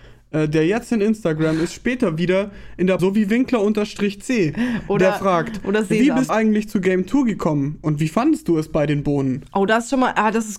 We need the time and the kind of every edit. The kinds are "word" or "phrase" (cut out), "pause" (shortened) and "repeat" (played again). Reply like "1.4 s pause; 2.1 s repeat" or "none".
3.0 s word; 6.3 s word